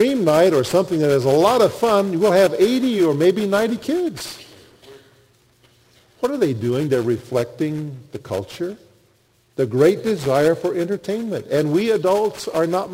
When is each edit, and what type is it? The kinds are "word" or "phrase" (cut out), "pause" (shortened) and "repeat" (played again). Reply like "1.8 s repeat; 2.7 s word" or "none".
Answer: none

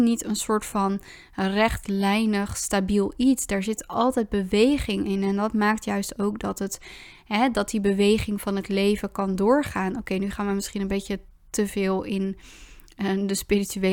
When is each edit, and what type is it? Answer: none

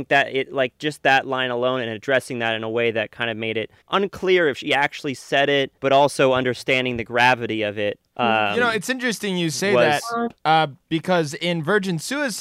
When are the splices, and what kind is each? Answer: 3.8 s pause; 5.8 s pause; 8.1 s pause; 10.4 s pause

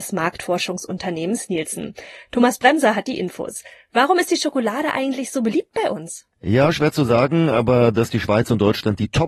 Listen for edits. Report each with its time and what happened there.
6.3 s pause

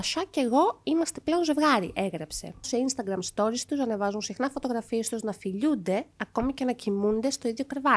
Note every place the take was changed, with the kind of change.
none

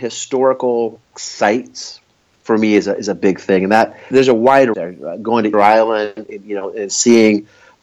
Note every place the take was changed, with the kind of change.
1.1 s word; 4.1 s word; 4.7 s word; 5.5 s word; 6.2 s word

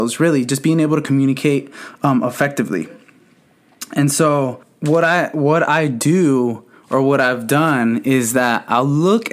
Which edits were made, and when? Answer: none

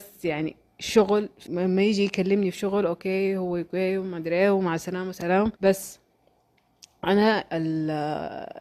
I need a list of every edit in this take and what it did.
1.5 s word; 5.5 s pause

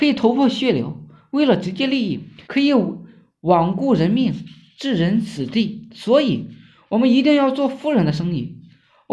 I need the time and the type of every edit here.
2.4 s pause

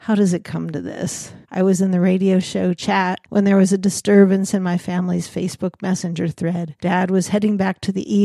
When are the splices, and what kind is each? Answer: 1.4 s pause; 3.2 s pause; 6.8 s pause

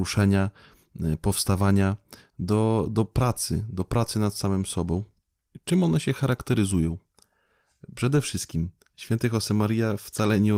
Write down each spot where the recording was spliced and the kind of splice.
none

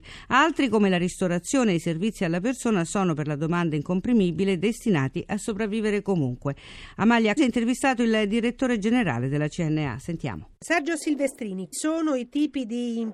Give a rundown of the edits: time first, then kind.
7.4 s word; 10.6 s pause; 11.7 s word

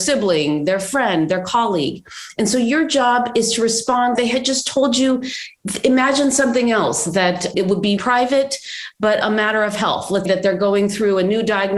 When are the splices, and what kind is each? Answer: 4.2 s word; 7.5 s word; 8.0 s word; 9.2 s word; 10.3 s word

